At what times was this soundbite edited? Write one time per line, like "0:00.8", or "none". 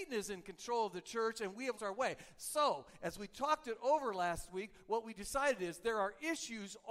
0:01.8